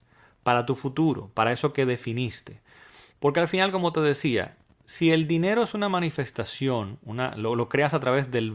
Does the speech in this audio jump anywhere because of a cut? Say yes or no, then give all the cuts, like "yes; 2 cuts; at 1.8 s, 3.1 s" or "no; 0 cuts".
no; 0 cuts